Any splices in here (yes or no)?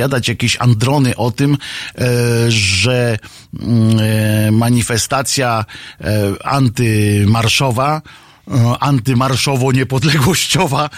no